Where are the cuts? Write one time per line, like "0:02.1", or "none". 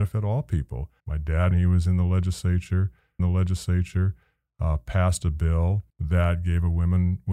0:01.0
0:01.5
0:03.2
0:05.9